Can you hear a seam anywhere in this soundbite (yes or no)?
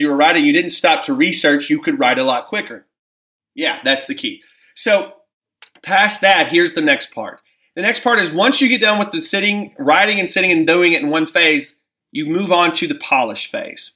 no